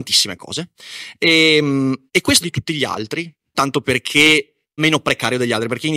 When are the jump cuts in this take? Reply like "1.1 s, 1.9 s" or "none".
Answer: 2.1 s, 2.4 s, 3.5 s, 4.8 s